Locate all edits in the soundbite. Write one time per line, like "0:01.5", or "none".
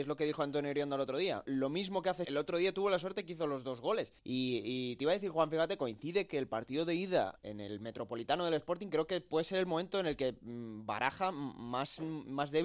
0:01.5
0:02.2
0:04.2
0:07.4